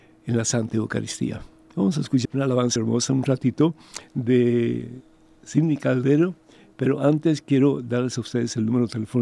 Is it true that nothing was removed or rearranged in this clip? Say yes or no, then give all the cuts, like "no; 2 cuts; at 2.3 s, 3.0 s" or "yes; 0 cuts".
no; 2 cuts; at 2.2 s, 2.8 s